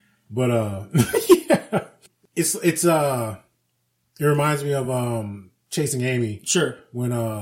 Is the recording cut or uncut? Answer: uncut